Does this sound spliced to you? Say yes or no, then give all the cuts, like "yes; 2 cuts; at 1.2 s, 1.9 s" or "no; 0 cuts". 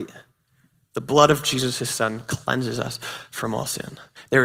no; 0 cuts